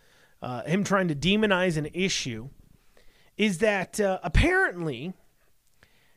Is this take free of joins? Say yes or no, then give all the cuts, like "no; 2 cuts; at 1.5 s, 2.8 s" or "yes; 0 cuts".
yes; 0 cuts